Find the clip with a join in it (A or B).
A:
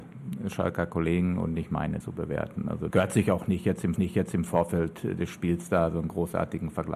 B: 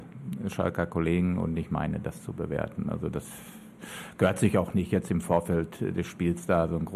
A